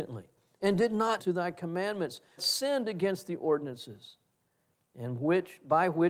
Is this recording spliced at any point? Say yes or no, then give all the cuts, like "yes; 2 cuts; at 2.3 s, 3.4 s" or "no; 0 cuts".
yes; 2 cuts; at 1.2 s, 2.4 s